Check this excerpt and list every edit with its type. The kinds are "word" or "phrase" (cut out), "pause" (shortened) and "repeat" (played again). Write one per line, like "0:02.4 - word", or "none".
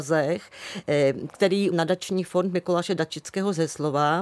0:01.7 - word